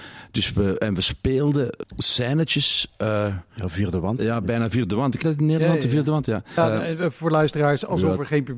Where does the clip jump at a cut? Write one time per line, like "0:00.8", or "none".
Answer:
0:01.8
0:05.2
0:06.6